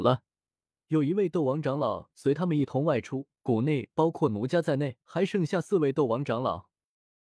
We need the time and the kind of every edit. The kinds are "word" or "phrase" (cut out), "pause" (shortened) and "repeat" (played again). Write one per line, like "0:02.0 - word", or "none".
0:03.3 - pause
0:05.0 - pause